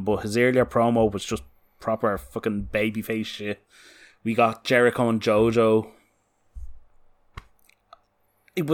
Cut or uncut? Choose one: uncut